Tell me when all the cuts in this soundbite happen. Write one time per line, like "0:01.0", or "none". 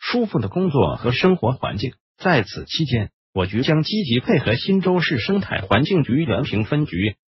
0:02.1